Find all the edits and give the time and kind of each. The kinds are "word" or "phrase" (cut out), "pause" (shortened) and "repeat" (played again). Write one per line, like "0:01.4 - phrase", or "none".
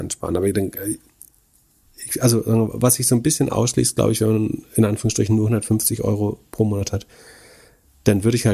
none